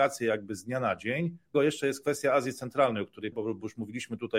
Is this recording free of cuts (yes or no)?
no